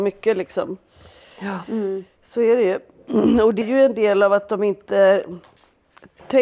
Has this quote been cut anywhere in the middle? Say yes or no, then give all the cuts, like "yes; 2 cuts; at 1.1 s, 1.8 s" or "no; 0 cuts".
yes; 1 cut; at 3.6 s